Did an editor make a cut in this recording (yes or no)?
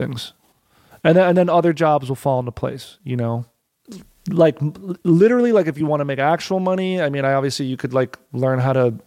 no